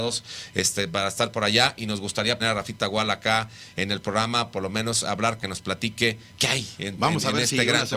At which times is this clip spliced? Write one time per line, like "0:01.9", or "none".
0:02.4
0:05.4
0:06.3